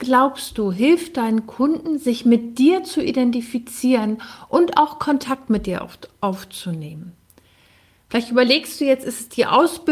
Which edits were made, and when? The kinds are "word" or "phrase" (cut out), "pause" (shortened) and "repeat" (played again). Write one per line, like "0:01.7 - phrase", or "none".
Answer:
none